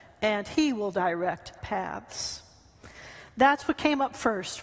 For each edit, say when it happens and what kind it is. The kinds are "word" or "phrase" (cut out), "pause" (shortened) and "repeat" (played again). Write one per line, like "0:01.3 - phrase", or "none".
0:01.6 - word